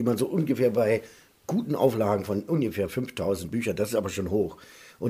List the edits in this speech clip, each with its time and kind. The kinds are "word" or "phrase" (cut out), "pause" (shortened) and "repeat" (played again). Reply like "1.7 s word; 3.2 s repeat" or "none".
none